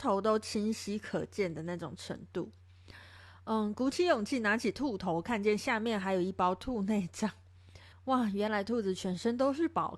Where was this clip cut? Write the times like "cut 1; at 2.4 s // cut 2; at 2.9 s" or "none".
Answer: cut 1; at 7.9 s